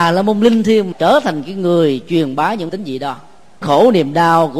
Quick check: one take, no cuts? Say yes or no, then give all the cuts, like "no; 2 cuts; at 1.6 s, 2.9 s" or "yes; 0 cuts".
no; 3 cuts; at 0.9 s, 2.7 s, 3.6 s